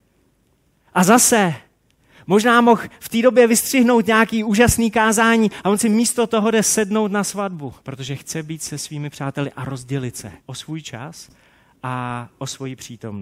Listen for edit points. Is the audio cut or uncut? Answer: cut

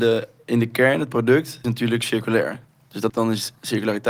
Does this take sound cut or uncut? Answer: cut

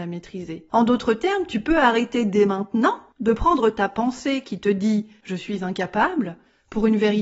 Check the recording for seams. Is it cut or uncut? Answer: uncut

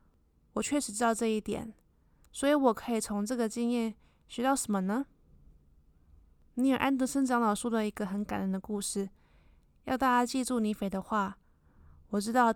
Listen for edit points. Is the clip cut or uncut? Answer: uncut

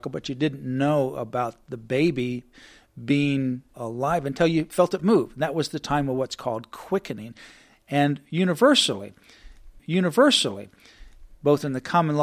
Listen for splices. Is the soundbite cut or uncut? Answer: cut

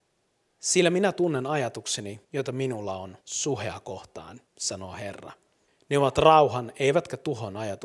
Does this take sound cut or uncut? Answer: cut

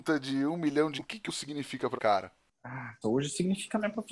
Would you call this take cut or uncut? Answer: cut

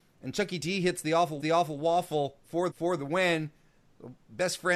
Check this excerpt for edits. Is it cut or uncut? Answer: cut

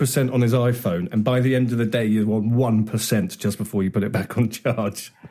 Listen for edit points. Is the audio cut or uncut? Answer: uncut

